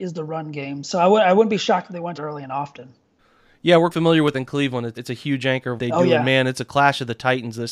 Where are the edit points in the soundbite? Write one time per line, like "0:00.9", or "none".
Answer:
0:02.2
0:03.9
0:04.3
0:05.0
0:05.8